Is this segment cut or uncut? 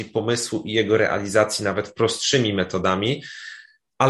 uncut